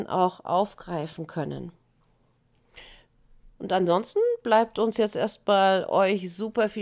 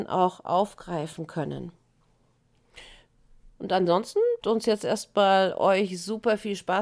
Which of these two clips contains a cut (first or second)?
second